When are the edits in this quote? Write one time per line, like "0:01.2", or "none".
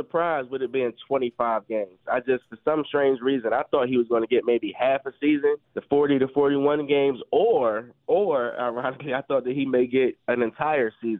0:05.6